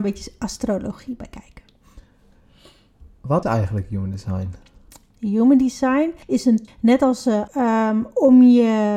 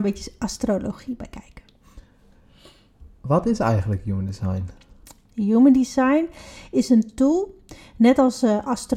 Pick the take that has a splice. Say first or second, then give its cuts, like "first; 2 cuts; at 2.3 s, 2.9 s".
first; 4 cuts; at 3.4 s, 6.2 s, 6.7 s, 7.5 s